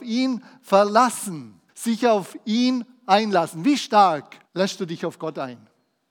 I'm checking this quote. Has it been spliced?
yes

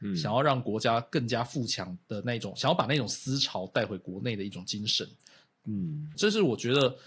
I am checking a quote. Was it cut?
yes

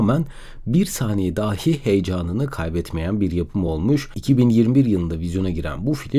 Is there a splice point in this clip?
no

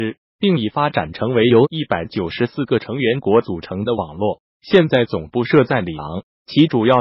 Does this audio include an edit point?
yes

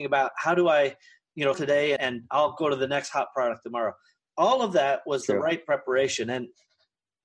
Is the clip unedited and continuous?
no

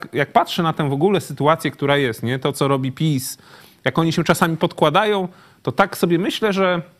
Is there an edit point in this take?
no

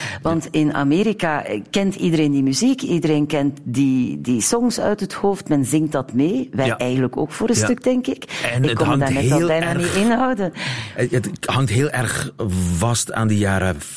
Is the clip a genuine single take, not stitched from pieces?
yes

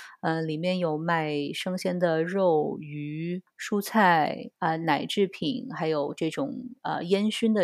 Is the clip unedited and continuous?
yes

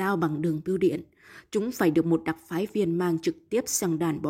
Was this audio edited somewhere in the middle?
no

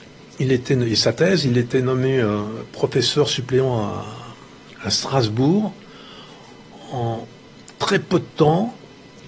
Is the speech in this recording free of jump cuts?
yes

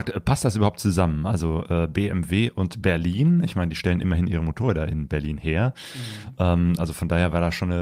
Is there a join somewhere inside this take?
no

